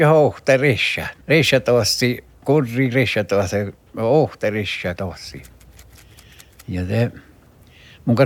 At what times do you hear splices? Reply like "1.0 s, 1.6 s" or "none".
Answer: 1.2 s, 5.0 s